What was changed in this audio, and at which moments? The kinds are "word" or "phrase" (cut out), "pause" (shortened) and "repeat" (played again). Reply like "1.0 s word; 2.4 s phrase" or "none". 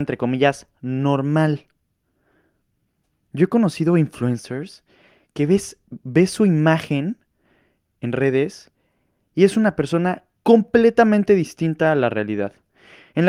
none